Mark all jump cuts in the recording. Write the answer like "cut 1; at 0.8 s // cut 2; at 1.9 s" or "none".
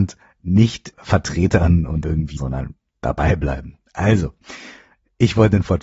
cut 1; at 0.9 s // cut 2; at 2.0 s // cut 3; at 2.4 s